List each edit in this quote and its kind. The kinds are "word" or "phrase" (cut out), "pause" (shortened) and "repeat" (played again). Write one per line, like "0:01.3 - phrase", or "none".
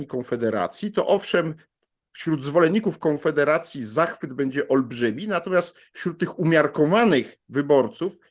none